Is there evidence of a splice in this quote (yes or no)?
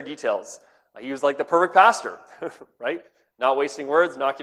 no